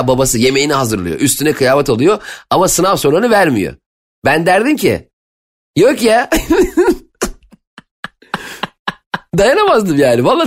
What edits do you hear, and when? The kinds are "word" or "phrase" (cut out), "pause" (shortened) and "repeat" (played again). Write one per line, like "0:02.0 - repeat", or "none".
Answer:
none